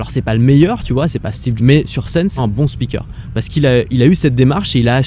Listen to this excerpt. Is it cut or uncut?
cut